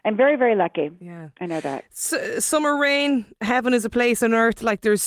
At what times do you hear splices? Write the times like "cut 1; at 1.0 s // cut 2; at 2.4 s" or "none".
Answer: none